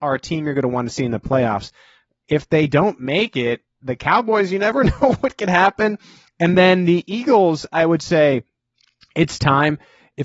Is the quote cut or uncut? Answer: uncut